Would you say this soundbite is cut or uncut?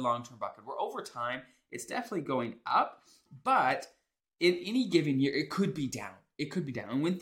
uncut